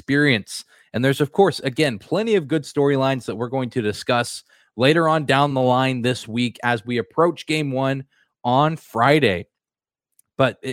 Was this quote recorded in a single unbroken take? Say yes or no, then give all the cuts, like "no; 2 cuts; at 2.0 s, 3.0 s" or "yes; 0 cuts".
yes; 0 cuts